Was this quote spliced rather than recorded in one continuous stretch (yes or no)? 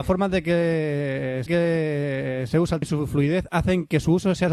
yes